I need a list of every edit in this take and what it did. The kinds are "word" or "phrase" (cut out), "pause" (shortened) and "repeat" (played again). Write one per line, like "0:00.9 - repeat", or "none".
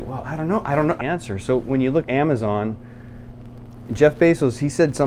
0:01.0 - phrase
0:02.0 - word